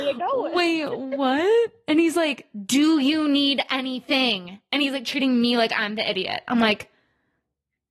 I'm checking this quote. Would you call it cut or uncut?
uncut